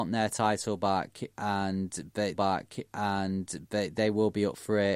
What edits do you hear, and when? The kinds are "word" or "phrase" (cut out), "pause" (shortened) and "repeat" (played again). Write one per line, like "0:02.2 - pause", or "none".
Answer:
0:02.3 - repeat